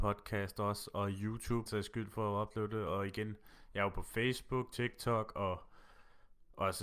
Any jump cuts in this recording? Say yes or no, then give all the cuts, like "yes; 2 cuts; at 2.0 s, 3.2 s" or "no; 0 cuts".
yes; 1 cut; at 1.7 s